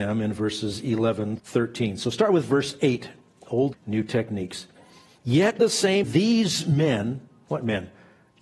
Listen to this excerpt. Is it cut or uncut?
cut